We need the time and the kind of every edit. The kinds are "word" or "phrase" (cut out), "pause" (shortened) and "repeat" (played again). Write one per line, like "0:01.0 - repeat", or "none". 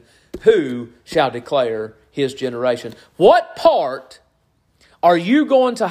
none